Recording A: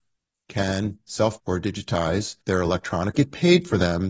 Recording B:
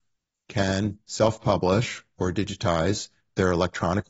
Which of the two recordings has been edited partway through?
A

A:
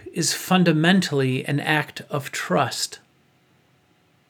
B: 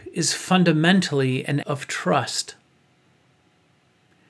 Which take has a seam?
B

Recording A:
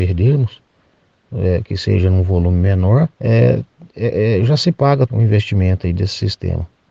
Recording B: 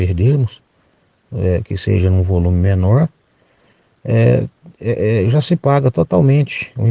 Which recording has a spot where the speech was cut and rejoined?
A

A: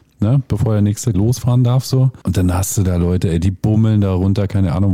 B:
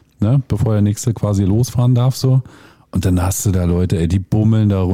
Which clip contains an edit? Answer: A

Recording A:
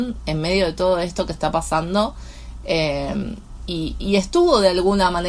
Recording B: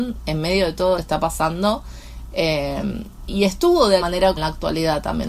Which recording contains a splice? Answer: B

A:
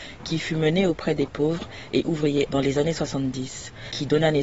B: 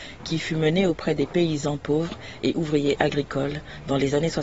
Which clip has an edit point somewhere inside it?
A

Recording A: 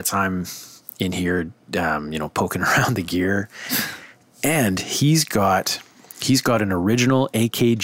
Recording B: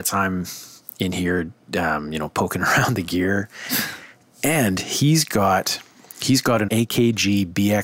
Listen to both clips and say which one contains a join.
B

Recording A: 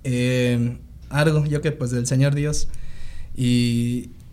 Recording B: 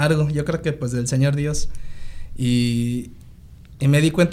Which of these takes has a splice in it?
A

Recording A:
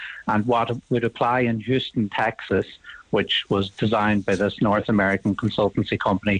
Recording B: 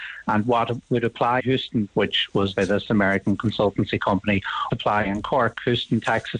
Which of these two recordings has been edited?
B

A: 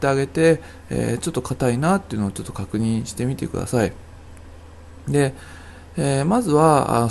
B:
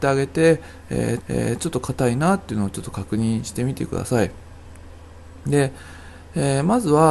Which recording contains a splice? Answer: B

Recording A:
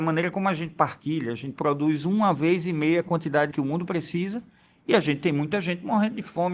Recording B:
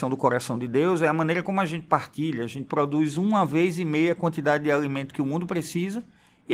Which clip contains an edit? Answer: A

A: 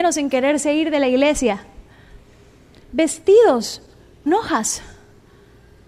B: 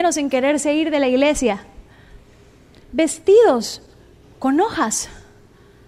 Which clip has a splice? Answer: A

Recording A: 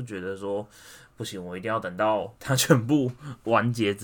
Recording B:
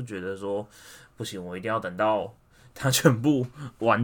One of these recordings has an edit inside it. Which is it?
A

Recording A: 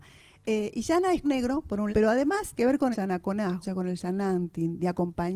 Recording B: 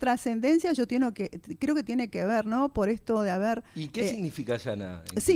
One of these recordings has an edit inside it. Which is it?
A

